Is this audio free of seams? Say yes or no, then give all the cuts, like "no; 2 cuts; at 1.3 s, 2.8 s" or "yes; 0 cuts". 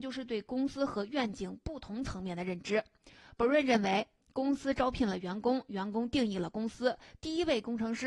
yes; 0 cuts